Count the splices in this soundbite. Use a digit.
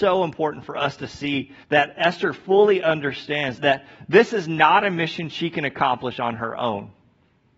2